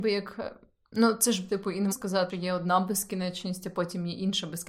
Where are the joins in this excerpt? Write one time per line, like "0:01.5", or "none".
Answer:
0:01.5
0:01.9
0:02.3